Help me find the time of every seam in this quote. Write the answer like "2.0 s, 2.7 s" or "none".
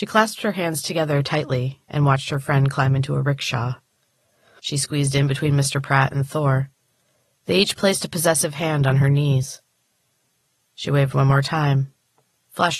none